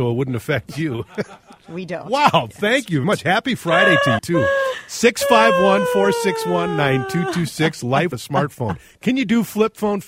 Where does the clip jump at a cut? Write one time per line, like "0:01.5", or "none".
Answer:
0:03.0
0:04.2
0:08.1